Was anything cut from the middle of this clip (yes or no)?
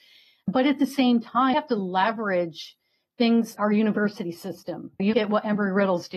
yes